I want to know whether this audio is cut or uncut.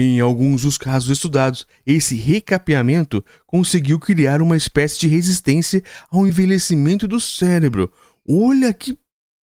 uncut